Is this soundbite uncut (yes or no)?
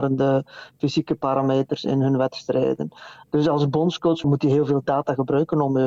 yes